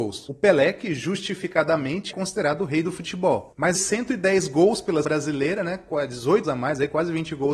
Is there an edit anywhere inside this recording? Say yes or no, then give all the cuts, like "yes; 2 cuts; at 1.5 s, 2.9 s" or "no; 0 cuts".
yes; 4 cuts; at 2.1 s, 3.7 s, 5.0 s, 6.4 s